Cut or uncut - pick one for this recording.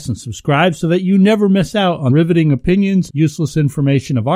cut